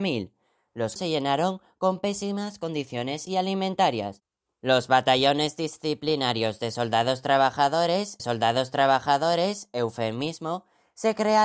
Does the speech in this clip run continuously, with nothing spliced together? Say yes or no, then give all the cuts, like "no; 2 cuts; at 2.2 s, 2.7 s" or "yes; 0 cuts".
no; 3 cuts; at 1.0 s, 3.3 s, 8.2 s